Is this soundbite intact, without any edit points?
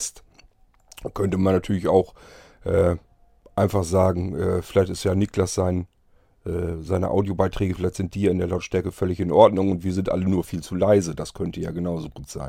yes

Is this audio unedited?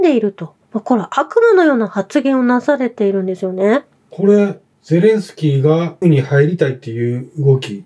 no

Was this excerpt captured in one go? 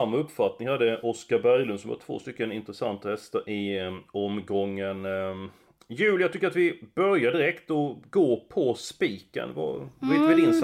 yes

